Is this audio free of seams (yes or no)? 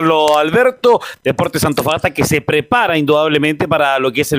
yes